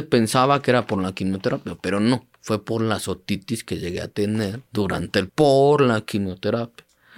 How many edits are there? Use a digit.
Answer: 2